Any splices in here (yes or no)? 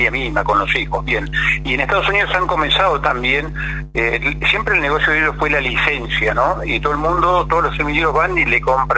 no